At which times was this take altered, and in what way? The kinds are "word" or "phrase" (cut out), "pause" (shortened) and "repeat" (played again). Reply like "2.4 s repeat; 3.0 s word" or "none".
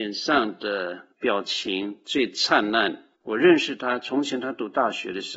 1.1 s pause; 3.1 s pause